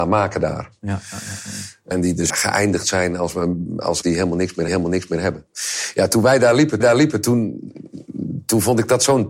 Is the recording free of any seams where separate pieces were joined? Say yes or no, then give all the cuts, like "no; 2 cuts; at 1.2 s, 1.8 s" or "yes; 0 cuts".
no; 5 cuts; at 1.9 s, 2.3 s, 4.0 s, 4.7 s, 6.8 s